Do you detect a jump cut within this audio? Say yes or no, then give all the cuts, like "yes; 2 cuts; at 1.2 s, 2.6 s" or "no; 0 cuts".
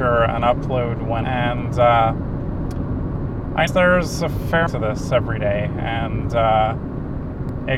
yes; 3 cuts; at 1.2 s, 3.7 s, 4.7 s